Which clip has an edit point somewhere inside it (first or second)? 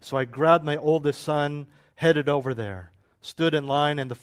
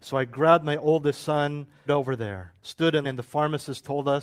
second